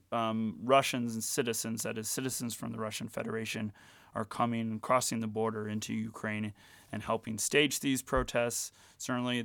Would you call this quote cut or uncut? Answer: uncut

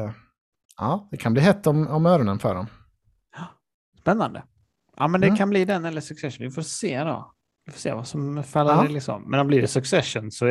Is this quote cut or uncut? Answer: uncut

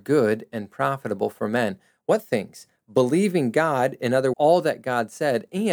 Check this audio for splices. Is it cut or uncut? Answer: cut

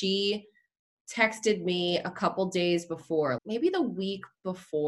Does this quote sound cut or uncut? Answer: cut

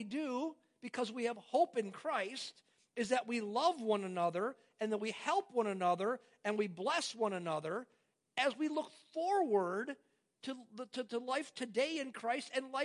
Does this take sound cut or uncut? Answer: uncut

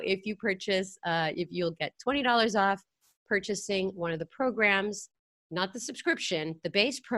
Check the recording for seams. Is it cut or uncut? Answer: uncut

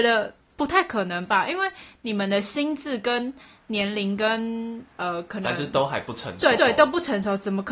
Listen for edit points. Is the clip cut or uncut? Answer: cut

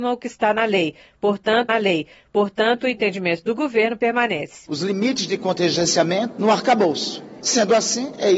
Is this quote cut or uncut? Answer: cut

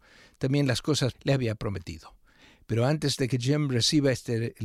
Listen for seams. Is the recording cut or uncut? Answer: cut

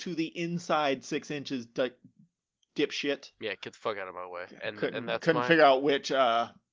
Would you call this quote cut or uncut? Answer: uncut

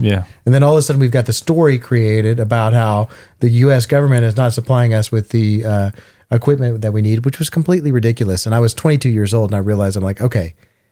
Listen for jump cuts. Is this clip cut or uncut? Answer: uncut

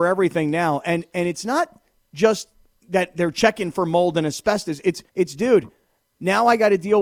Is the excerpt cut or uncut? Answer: cut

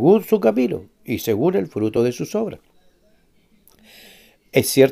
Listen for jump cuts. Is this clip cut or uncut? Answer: uncut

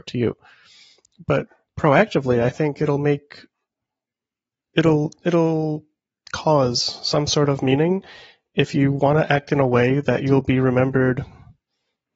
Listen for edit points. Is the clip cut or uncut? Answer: uncut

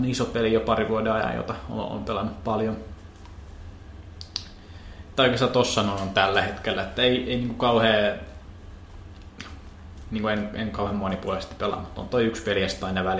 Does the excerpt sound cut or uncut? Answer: uncut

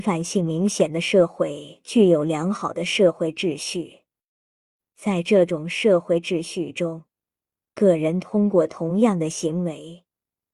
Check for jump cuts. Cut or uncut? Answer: uncut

